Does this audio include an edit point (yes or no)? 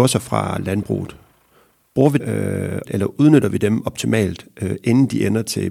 yes